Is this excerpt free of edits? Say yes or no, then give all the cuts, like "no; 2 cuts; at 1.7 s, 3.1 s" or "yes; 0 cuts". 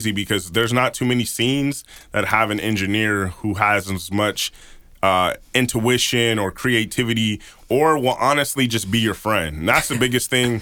yes; 0 cuts